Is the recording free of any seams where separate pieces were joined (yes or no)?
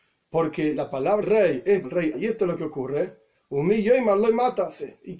no